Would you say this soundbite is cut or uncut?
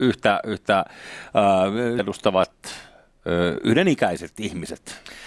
cut